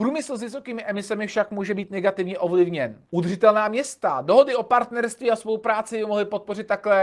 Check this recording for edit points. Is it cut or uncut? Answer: cut